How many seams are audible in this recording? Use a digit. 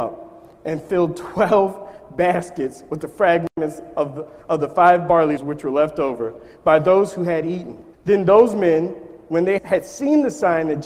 3